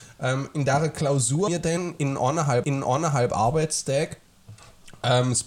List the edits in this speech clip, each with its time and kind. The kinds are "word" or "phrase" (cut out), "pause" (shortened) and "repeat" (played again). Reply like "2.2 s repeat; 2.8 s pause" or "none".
1.5 s word; 2.6 s repeat